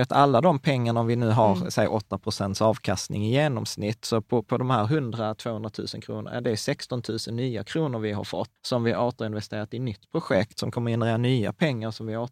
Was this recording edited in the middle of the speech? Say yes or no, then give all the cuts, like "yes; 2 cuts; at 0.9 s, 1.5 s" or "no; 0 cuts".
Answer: yes; 1 cut; at 8.6 s